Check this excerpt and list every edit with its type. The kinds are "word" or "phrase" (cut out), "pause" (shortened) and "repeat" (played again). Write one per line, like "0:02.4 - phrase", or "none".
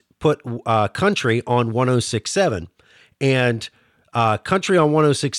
none